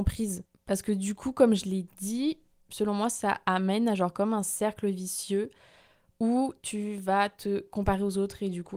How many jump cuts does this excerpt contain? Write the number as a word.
one